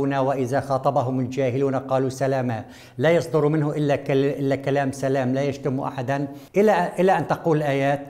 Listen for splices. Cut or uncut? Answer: cut